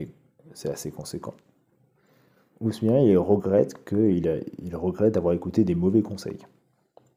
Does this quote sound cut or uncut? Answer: uncut